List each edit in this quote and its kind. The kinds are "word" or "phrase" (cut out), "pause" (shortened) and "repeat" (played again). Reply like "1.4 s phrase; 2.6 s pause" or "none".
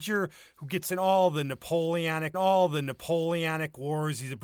2.3 s repeat